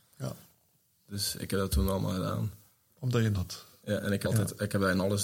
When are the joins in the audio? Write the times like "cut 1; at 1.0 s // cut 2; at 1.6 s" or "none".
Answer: cut 1; at 3.3 s // cut 2; at 4.2 s

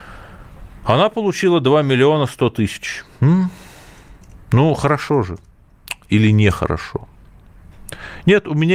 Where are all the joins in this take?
cut 1; at 3.1 s

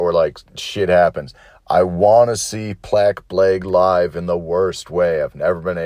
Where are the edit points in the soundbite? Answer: none

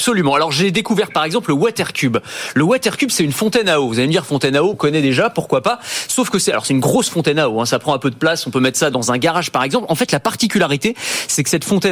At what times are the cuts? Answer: cut 1; at 4.7 s

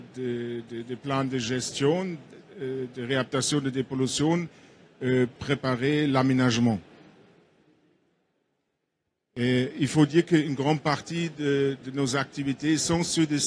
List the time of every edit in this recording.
cut 1; at 5.4 s // cut 2; at 11.8 s

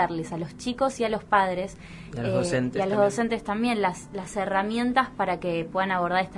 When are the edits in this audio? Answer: none

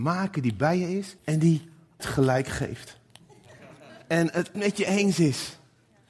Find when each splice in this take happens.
cut 1; at 1.2 s // cut 2; at 2.0 s // cut 3; at 4.0 s // cut 4; at 4.5 s

